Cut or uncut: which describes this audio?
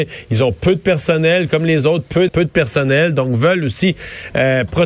cut